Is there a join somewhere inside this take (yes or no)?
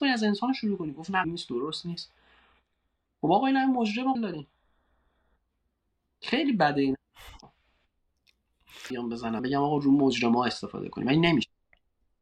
yes